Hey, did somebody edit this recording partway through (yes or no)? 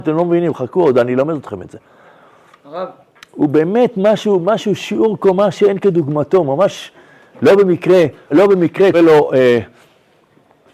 yes